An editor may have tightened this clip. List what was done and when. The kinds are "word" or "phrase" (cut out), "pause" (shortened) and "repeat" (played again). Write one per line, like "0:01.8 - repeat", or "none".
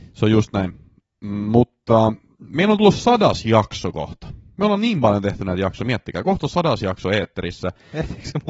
none